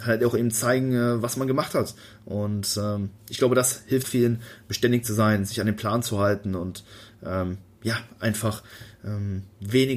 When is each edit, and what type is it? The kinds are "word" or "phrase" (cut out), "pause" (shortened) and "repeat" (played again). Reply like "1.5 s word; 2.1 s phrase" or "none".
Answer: 4.0 s word